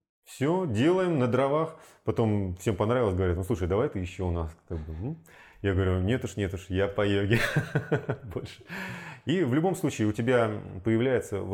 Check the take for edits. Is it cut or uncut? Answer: uncut